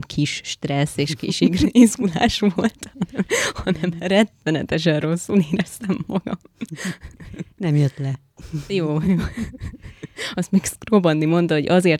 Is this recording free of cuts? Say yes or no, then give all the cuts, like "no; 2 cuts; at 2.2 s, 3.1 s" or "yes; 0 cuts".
yes; 0 cuts